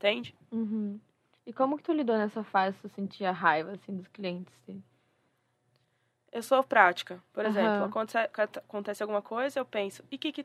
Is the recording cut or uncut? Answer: uncut